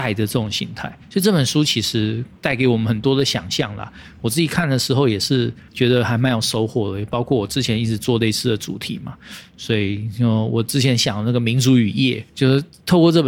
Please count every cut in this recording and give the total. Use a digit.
3